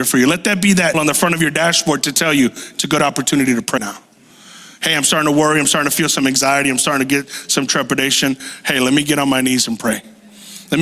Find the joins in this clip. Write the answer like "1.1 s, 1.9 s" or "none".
0.9 s, 3.8 s